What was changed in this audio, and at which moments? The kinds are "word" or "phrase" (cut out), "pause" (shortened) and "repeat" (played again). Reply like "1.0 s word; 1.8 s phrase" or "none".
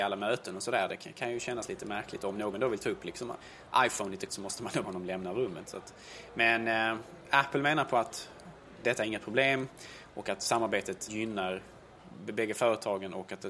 4.3 s word; 4.8 s word; 8.8 s word; 11.1 s word